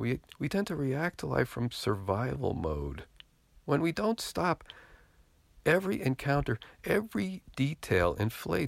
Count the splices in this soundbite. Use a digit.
0